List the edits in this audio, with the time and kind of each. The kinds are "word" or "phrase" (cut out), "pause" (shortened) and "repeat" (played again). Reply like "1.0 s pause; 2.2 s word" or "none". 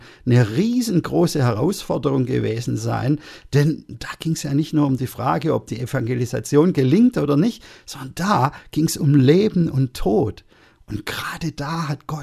none